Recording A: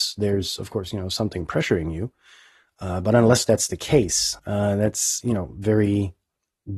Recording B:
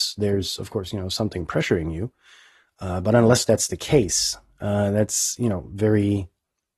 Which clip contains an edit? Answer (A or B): A